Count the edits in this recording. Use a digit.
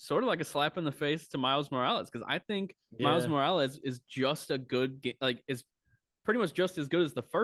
0